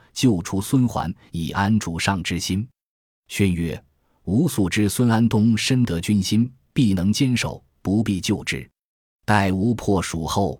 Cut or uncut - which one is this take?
uncut